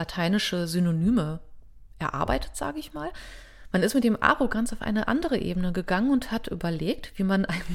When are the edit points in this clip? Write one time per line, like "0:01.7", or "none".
none